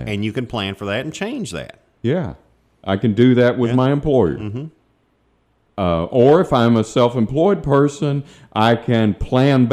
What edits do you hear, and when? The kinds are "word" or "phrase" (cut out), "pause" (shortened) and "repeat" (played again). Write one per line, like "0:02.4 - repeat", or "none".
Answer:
none